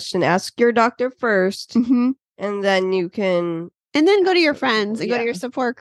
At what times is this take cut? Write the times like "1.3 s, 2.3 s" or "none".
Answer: none